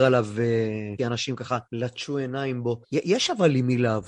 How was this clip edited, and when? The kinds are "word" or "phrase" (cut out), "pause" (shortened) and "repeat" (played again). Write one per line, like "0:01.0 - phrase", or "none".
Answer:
0:01.0 - phrase
0:01.7 - pause
0:02.8 - pause